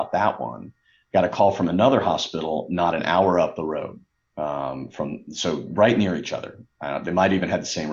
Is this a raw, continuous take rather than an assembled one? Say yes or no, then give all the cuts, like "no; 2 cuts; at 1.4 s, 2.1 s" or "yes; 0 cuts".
yes; 0 cuts